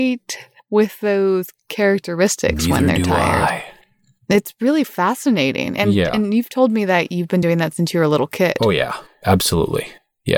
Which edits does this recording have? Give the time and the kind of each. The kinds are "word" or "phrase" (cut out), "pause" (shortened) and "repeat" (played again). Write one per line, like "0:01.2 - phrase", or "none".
none